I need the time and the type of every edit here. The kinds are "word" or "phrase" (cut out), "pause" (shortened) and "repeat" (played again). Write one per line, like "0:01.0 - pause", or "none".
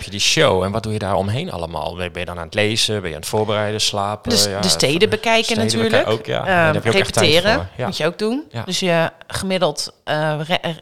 none